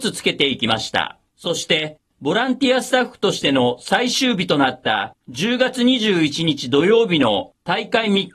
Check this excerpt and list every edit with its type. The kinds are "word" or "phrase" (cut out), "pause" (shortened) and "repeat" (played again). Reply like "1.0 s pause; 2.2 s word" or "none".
1.3 s pause; 5.2 s pause